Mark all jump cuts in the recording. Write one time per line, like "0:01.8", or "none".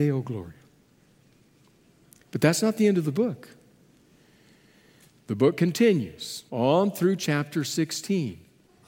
0:06.5